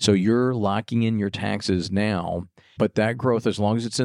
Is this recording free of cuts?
yes; 0 cuts

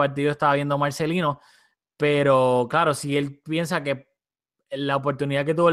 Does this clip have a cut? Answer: no; 0 cuts

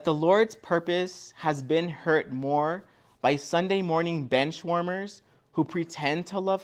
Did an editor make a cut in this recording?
no; 0 cuts

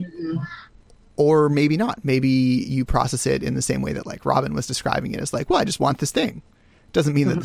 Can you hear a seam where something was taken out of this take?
no; 0 cuts

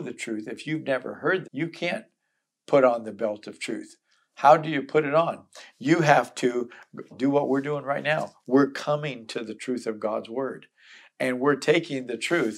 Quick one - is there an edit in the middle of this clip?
yes; 2 cuts; at 1.4 s, 7.1 s

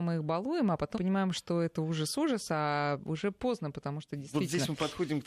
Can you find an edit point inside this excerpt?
yes; 1 cut; at 0.9 s

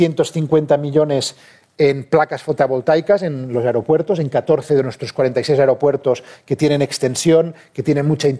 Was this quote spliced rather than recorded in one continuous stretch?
no; 0 cuts

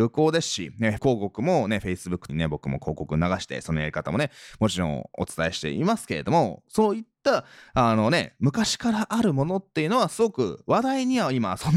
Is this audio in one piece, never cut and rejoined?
no; 2 cuts; at 1.0 s, 2.3 s

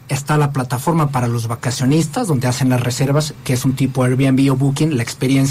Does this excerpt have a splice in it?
no; 0 cuts

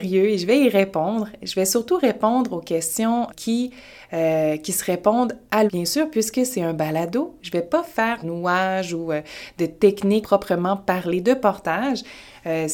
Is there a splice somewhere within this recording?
yes; 4 cuts; at 3.3 s, 5.7 s, 8.2 s, 10.2 s

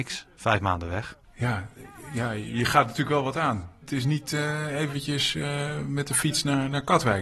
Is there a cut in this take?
yes; 1 cut; at 1.2 s

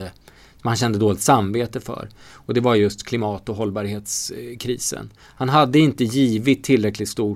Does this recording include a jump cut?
no; 0 cuts

